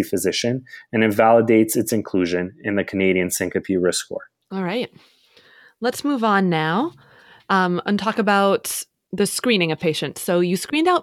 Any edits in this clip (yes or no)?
no